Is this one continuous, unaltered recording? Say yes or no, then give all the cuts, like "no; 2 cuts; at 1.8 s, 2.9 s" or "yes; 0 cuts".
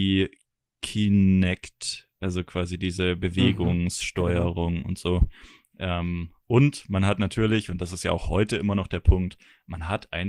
yes; 0 cuts